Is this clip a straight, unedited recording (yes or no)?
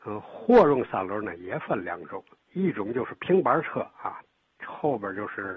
yes